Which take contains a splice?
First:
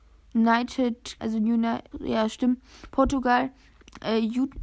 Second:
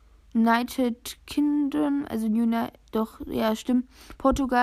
first; 2 cuts; at 1.2 s, 1.9 s

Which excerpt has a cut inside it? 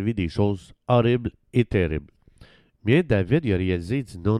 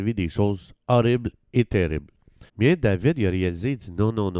second; 1 cut; at 2.5 s

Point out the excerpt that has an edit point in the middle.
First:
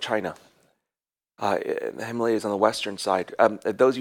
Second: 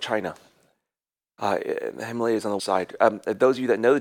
second; 1 cut; at 2.6 s

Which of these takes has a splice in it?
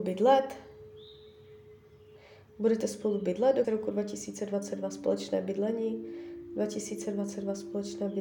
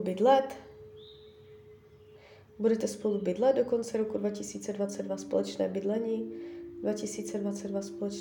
first; 1 cut; at 3.6 s

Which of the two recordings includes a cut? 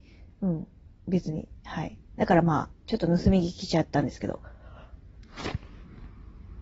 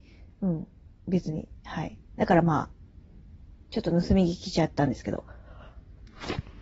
first; 1 cut; at 2.8 s

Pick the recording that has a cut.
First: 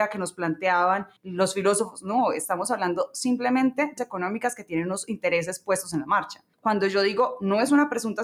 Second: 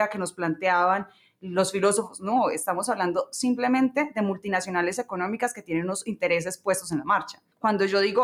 first; 2 cuts; at 1.2 s, 4.0 s

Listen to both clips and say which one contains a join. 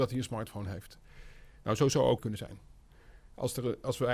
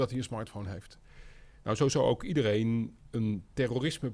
first; 1 cut; at 2.2 s

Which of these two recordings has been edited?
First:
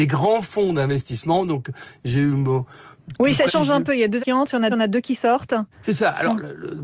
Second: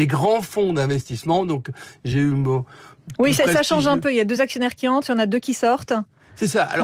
first; 4 cuts; at 3.5 s, 4.2 s, 4.7 s, 5.7 s

